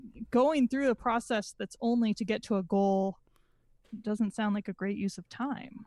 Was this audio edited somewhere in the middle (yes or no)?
no